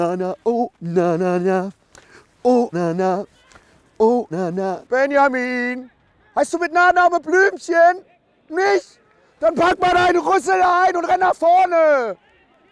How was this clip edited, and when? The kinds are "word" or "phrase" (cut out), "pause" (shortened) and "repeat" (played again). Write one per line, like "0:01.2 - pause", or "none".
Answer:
0:02.7 - word
0:04.3 - word